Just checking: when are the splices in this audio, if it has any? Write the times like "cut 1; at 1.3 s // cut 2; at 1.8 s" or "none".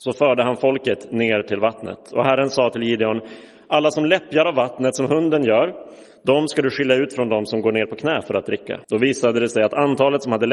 cut 1; at 8.8 s